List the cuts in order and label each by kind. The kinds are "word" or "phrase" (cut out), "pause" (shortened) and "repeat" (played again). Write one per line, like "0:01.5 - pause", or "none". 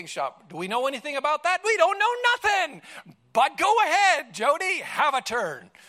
none